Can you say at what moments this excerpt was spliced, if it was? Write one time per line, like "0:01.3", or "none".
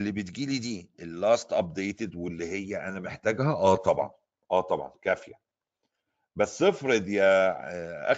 none